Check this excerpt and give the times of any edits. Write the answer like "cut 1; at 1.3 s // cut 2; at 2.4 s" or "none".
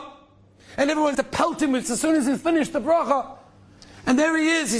cut 1; at 1.1 s // cut 2; at 1.8 s